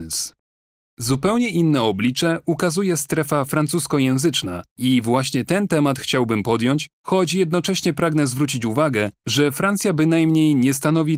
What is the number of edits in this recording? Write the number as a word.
two